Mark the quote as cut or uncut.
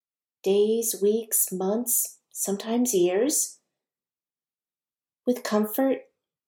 uncut